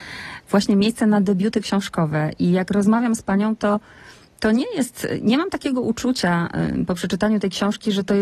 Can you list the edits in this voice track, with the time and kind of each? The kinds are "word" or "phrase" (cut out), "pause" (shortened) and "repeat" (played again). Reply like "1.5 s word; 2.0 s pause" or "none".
none